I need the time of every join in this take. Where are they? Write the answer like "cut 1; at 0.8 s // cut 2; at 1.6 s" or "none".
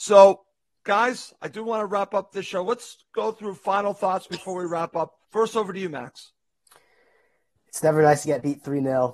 cut 1; at 5.2 s